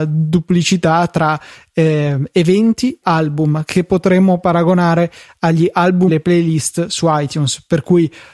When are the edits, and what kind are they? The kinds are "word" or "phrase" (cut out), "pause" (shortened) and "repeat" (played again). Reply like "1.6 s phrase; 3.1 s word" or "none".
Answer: 3.0 s word; 6.1 s phrase